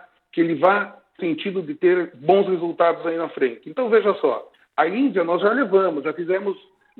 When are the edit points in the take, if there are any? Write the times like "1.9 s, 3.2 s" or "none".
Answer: 1.2 s